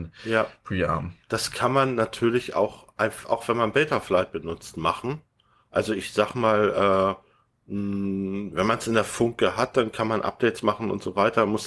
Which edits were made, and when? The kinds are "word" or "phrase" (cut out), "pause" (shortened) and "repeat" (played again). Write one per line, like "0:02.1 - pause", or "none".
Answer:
0:01.2 - pause